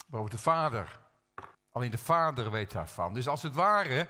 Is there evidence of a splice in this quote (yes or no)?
yes